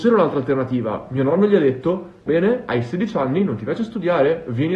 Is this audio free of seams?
no; 1 cut; at 2.3 s

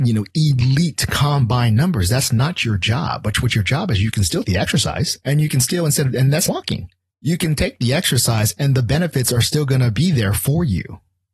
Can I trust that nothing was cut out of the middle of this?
no; 3 cuts; at 4.4 s, 6.5 s, 7.0 s

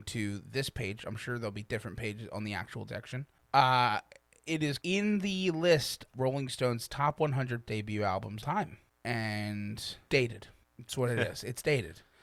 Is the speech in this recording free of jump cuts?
no; 6 cuts; at 2.9 s, 4.8 s, 6.1 s, 7.7 s, 8.4 s, 10.1 s

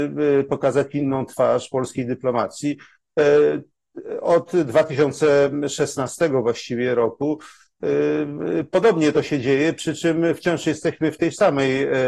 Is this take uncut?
yes; 0 cuts

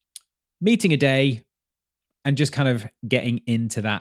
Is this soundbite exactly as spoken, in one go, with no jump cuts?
yes; 0 cuts

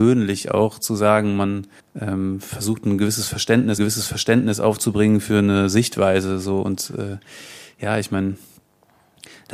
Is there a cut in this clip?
yes; 2 cuts; at 1.8 s, 3.8 s

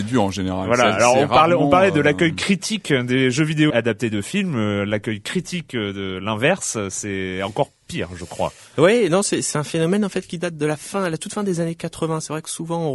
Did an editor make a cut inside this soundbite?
yes; 2 cuts; at 3.7 s, 9.5 s

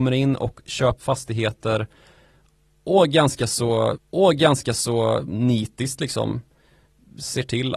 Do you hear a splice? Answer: yes; 2 cuts; at 1.0 s, 3.9 s

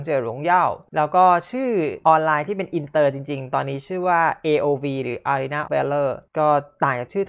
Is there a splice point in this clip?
yes; 1 cut; at 5.7 s

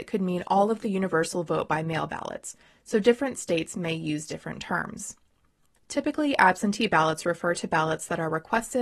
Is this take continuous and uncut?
yes; 0 cuts

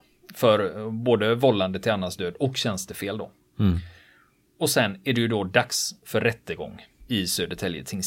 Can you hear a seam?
no; 0 cuts

